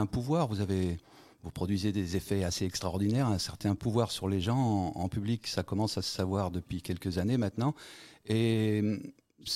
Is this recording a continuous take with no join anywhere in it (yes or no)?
yes